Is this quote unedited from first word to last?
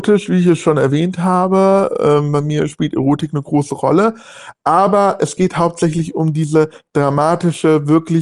yes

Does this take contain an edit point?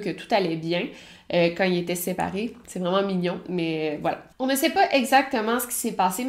yes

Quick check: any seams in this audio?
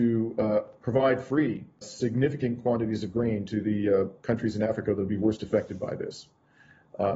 yes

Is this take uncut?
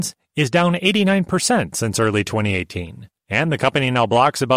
no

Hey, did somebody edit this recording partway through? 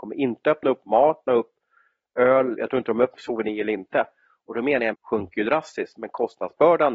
yes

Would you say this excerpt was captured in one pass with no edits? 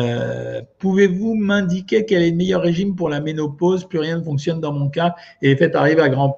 yes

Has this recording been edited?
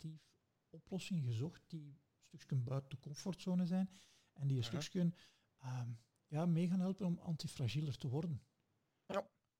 no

